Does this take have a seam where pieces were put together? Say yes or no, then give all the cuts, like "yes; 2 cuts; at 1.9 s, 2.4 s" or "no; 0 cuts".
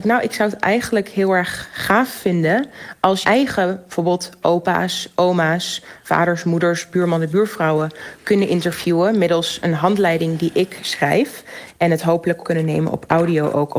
yes; 2 cuts; at 3.2 s, 12.4 s